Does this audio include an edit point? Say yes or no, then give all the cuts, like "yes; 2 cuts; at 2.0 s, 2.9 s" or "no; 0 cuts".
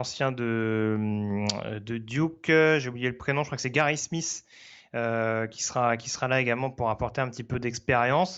no; 0 cuts